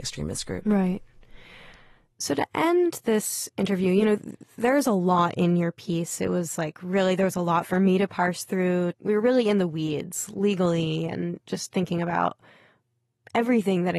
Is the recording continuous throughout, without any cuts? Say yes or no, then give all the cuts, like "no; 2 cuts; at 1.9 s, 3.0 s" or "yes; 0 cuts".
yes; 0 cuts